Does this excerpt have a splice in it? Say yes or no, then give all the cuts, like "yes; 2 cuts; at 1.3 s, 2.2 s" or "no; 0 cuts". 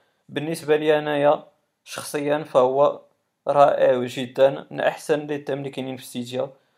no; 0 cuts